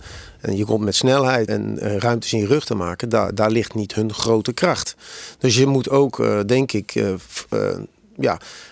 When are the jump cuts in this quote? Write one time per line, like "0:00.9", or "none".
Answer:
0:01.5

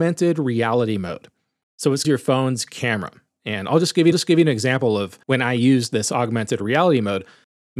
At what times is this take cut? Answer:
0:02.0
0:04.1
0:05.2

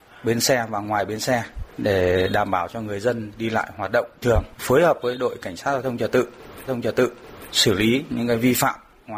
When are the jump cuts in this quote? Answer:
0:01.7
0:04.2
0:04.5
0:06.7

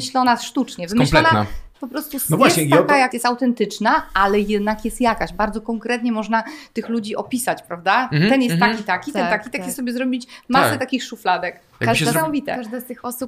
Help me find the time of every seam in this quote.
0:03.1

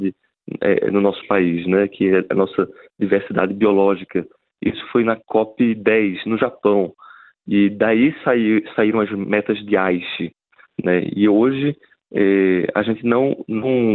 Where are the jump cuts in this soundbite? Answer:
none

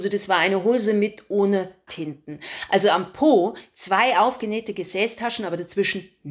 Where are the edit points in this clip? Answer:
0:01.9

